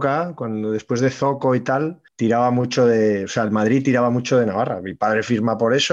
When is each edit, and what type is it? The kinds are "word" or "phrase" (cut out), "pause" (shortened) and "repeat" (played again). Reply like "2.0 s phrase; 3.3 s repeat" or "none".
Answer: 2.1 s pause